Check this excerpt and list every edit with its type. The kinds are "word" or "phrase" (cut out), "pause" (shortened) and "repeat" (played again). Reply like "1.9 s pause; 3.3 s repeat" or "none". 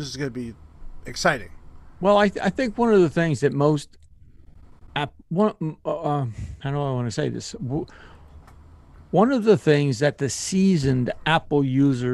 none